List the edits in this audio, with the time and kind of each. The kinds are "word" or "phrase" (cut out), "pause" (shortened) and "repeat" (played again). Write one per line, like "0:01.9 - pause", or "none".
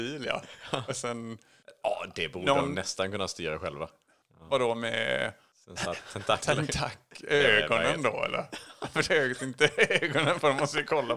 0:09.1 - word

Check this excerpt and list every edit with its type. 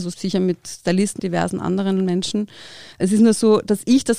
0:01.2 - word
0:02.9 - pause

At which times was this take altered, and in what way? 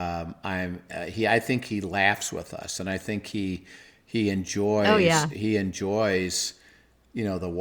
none

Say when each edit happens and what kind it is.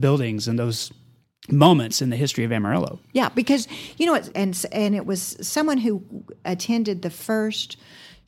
0:04.3 - phrase

